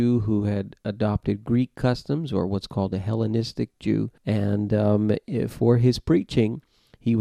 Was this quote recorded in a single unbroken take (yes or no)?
no